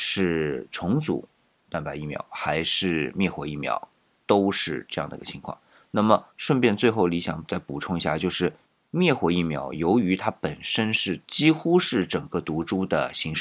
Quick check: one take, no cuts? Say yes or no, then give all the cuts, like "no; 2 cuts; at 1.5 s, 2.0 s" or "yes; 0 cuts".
no; 3 cuts; at 4.1 s, 6.3 s, 8.6 s